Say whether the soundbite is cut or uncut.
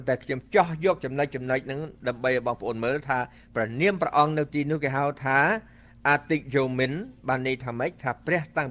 uncut